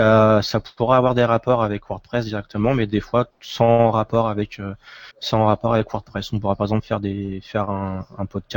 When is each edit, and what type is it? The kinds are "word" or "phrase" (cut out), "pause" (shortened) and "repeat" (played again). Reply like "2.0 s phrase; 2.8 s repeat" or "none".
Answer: 3.3 s pause; 5.1 s pause